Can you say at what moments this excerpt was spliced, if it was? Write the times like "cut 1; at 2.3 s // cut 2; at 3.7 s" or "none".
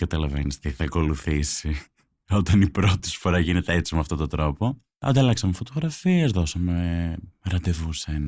none